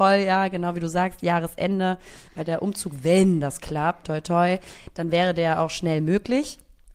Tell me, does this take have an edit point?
yes; 1 cut; at 4.0 s

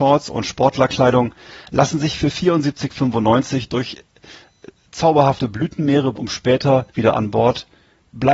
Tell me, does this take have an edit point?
yes; 2 cuts; at 6.1 s, 6.9 s

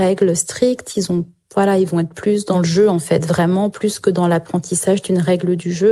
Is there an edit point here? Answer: no; 0 cuts

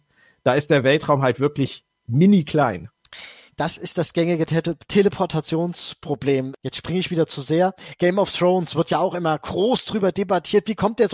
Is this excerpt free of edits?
yes; 0 cuts

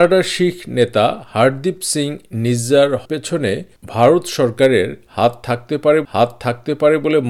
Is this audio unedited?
no; 2 cuts; at 3.0 s, 6.0 s

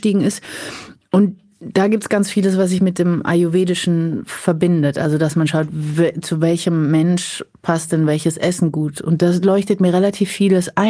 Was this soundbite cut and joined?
no; 0 cuts

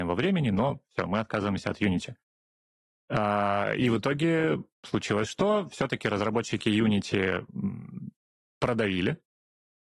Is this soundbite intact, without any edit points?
yes; 0 cuts

